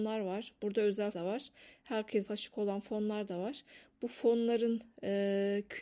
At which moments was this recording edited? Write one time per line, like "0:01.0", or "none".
0:01.1
0:02.3